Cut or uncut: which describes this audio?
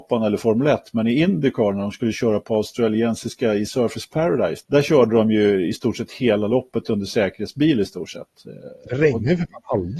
cut